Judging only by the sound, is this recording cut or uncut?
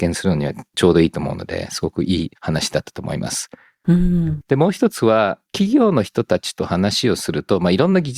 cut